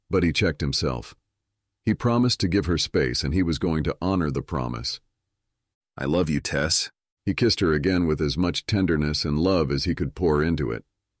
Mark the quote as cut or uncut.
uncut